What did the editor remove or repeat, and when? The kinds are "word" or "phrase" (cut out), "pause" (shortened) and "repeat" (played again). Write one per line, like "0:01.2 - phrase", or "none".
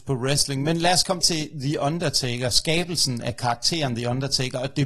0:01.2 - word

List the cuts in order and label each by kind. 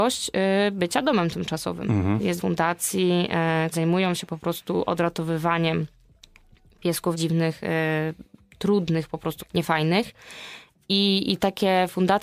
0:02.4 - word
0:03.7 - word
0:07.1 - word
0:09.4 - word

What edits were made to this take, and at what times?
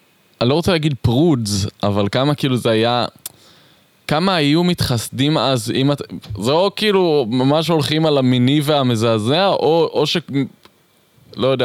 none

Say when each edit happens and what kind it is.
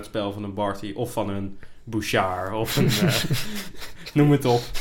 none

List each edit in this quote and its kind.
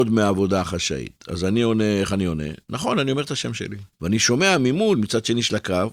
0:03.9 - pause

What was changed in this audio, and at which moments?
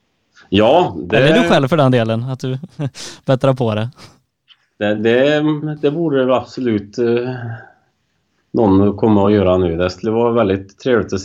none

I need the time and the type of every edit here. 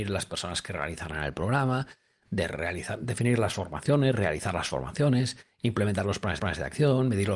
0:06.4 - repeat

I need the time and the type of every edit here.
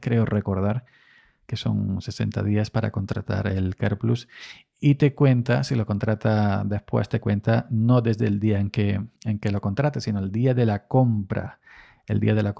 0:09.2 - pause

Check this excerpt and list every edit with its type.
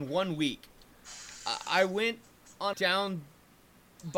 0:02.7 - phrase

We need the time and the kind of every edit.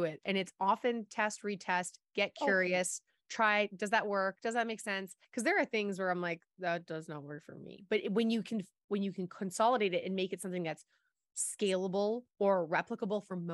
0:05.2 - pause
0:12.3 - pause

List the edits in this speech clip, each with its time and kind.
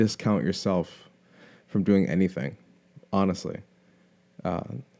none

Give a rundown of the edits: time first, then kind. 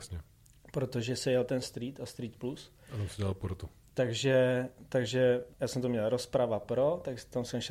0:05.5 - word

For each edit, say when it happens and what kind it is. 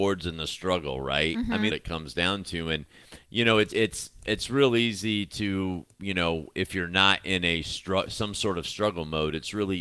0:01.7 - phrase
0:03.7 - word
0:05.9 - pause

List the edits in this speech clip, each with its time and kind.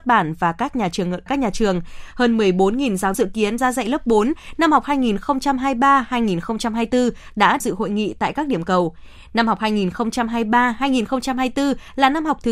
0:01.3 - word
0:03.1 - word
0:03.6 - word
0:07.6 - word

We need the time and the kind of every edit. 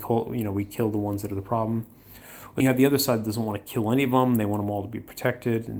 0:02.6 - word

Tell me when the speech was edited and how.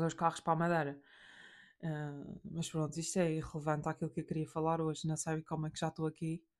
none

